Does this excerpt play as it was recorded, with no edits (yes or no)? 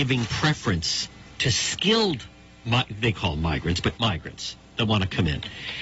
no